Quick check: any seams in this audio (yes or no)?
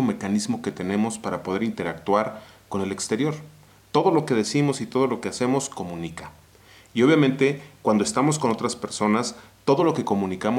no